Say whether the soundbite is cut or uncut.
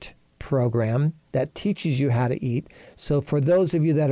uncut